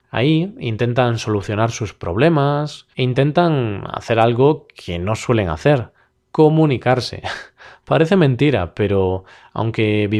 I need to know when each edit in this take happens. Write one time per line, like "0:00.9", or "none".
0:02.9